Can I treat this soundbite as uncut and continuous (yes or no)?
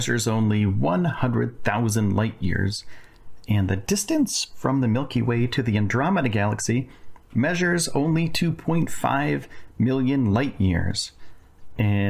yes